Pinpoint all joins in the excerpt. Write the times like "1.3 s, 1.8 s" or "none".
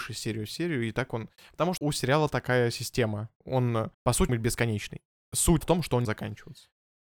1.8 s, 3.9 s, 4.3 s, 5.6 s, 6.0 s